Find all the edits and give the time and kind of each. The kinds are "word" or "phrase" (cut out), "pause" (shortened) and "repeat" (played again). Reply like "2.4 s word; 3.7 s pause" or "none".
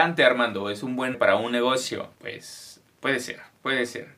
1.1 s word; 2.1 s pause